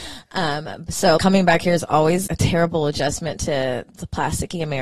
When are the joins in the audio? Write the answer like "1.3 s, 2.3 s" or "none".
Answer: 1.2 s, 2.3 s